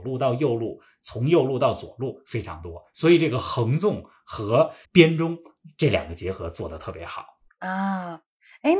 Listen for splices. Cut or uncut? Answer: cut